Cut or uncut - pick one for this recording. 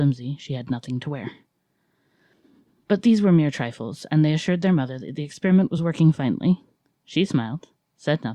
uncut